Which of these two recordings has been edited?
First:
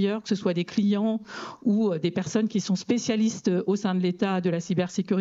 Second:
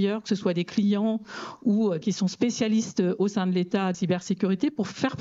second; 2 cuts; at 2.0 s, 3.9 s

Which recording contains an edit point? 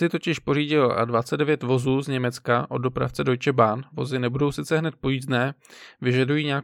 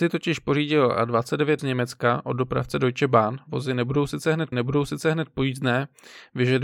second; 2 cuts; at 1.6 s, 4.5 s

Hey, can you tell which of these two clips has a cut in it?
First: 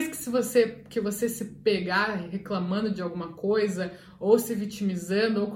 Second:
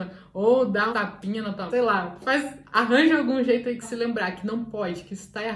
second; 3 cuts; at 0.9 s, 1.7 s, 3.8 s

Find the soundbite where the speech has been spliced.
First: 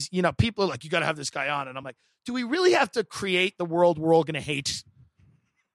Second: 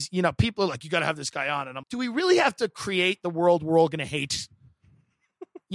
second; 1 cut; at 1.8 s

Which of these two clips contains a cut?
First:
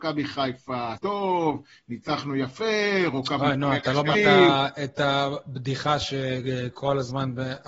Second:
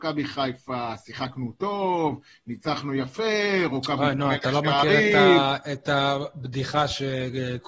first; 2 cuts; at 1.0 s, 4.1 s

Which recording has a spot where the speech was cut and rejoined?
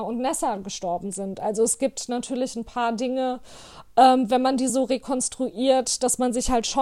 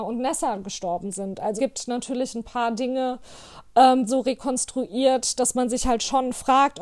second; 2 cuts; at 1.6 s, 4.1 s

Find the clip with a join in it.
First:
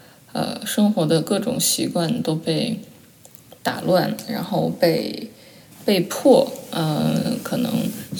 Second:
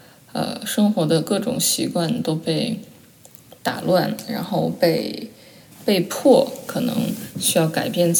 second; 1 cut; at 6.7 s

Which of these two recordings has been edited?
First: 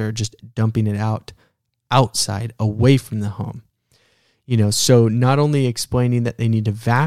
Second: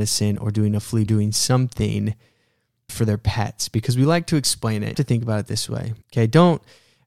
second; 4 cuts; at 1.1 s, 2.9 s, 4.9 s, 6.0 s

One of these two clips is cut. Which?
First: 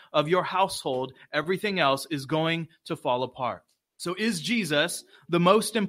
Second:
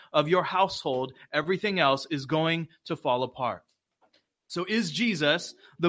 first; 1 cut; at 3.8 s

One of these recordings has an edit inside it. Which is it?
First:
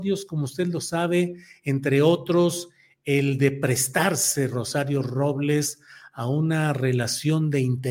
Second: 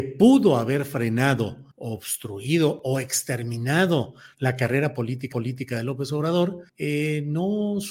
second; 3 cuts; at 1.7 s, 5.3 s, 6.7 s

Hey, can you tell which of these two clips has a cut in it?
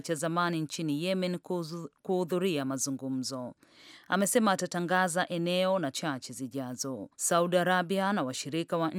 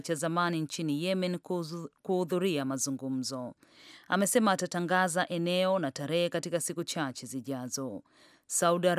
first; 2 cuts; at 5.9 s, 7.1 s

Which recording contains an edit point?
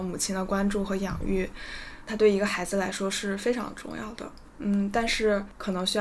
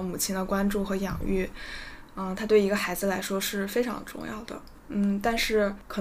first; 1 cut; at 2.1 s

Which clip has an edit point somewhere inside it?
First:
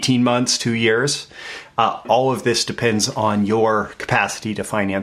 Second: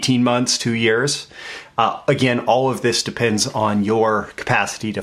first; 1 cut; at 2.0 s

